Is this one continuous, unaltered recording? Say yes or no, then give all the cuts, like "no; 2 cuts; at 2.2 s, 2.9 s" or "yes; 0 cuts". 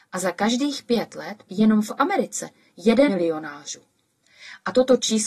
no; 2 cuts; at 1.5 s, 3.1 s